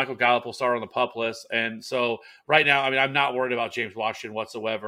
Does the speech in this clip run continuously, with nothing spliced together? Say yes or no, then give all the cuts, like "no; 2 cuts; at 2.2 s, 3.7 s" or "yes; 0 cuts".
yes; 0 cuts